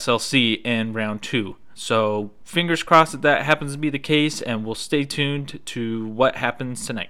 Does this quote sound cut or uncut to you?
cut